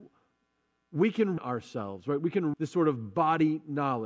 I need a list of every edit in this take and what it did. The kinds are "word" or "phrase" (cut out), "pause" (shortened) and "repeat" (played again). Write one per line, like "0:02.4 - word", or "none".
0:01.4 - word
0:02.5 - word

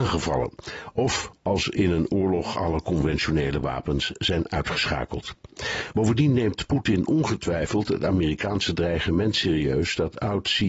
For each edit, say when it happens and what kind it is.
none

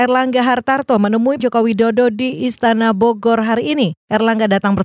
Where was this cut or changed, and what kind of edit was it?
0:01.4 - word

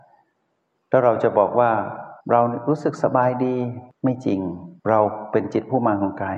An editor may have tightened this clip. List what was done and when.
0:02.2 - pause
0:03.9 - pause
0:04.8 - pause

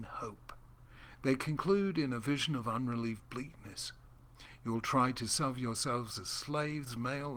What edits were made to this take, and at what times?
none

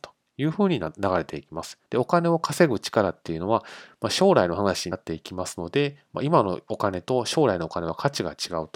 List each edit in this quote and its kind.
0:01.9 - pause

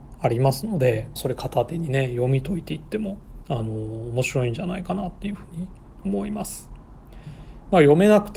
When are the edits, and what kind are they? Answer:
0:01.2 - phrase

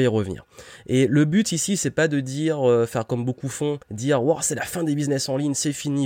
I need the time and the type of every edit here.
0:03.8 - pause

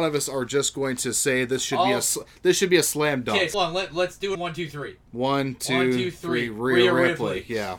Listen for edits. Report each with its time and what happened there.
0:03.5 - word
0:04.3 - word

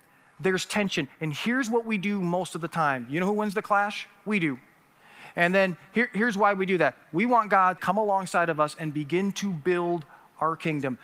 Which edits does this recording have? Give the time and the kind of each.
0:07.8 - phrase

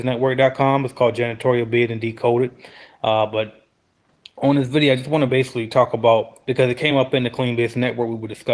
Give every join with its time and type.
none

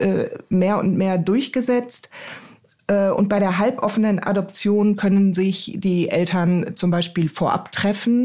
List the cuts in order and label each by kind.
none

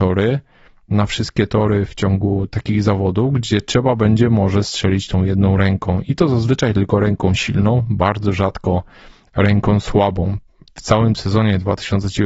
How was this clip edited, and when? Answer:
none

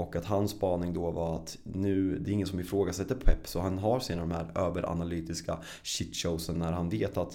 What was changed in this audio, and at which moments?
none

